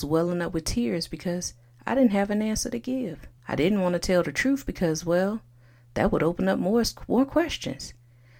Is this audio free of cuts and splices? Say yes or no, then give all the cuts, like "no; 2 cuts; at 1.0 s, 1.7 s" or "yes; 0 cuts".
no; 1 cut; at 3.4 s